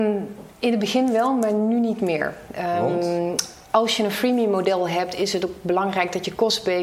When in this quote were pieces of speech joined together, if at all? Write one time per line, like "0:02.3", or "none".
0:03.6